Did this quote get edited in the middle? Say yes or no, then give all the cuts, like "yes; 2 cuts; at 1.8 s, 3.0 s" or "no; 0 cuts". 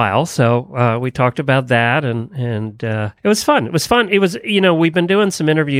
yes; 1 cut; at 3.2 s